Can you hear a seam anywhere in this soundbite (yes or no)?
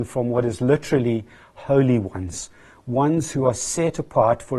no